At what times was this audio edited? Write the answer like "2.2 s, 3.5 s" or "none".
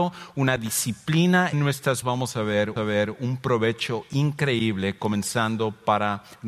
1.5 s, 2.0 s, 2.8 s